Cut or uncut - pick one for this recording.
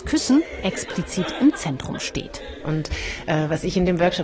uncut